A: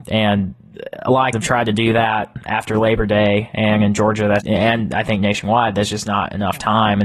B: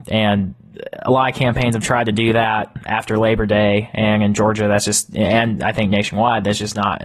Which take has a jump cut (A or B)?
A